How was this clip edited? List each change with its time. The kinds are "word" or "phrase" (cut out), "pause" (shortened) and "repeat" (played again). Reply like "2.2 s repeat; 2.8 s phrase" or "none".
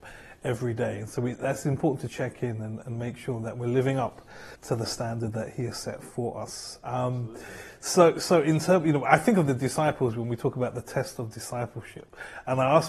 4.5 s pause